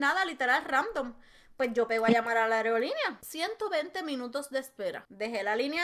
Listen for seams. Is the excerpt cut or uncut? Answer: uncut